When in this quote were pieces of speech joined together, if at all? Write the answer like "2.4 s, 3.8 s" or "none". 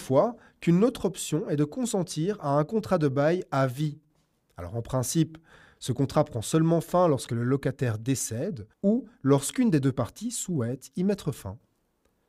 8.7 s